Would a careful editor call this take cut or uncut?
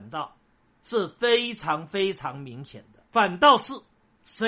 cut